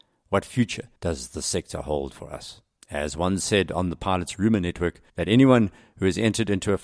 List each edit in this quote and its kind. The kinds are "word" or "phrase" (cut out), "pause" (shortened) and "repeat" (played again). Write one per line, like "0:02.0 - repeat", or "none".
0:01.0 - pause
0:02.8 - pause
0:05.1 - pause